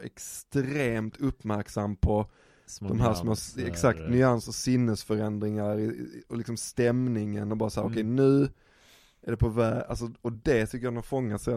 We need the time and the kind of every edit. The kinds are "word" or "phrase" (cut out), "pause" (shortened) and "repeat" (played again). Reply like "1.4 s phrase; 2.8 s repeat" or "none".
none